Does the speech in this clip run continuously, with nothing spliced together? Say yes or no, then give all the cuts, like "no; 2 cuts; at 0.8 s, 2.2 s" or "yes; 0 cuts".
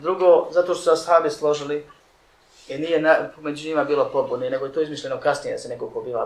yes; 0 cuts